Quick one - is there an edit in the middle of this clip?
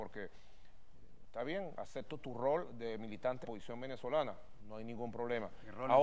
yes; 1 cut; at 3.4 s

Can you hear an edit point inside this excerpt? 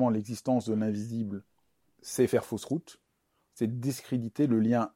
no; 0 cuts

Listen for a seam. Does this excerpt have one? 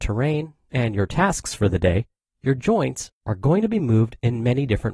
no; 0 cuts

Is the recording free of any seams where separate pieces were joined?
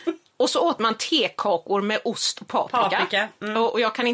yes; 0 cuts

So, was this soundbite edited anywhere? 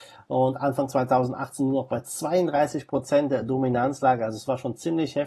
no; 0 cuts

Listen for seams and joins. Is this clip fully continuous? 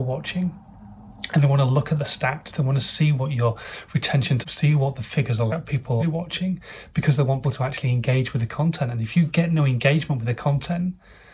no; 4 cuts; at 4.4 s, 5.5 s, 6.0 s, 7.4 s

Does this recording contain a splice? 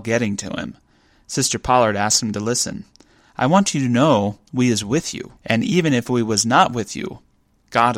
yes; 1 cut; at 5.4 s

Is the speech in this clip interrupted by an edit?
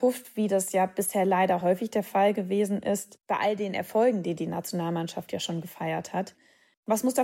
no; 0 cuts

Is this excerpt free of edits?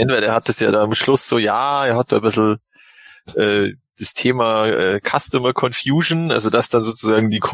yes; 0 cuts

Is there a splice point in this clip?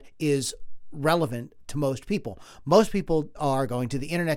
yes; 1 cut; at 3.3 s

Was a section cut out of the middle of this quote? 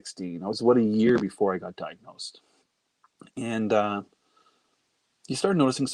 no; 0 cuts

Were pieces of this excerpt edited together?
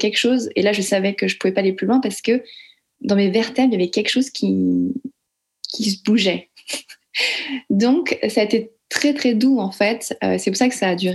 no; 0 cuts

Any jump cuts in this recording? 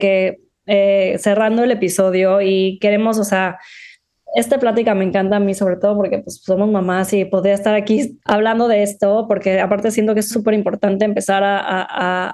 yes; 2 cuts; at 8.2 s, 10.3 s

